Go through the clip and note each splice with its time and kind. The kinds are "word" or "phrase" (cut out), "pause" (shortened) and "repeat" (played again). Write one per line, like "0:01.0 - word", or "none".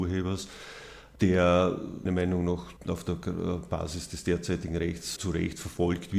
0:02.1 - word
0:02.8 - pause
0:05.2 - word